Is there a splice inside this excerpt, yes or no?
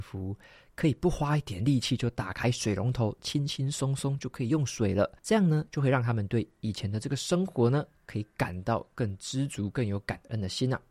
yes